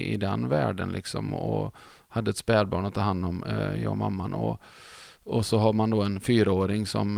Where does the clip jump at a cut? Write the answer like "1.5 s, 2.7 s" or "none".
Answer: none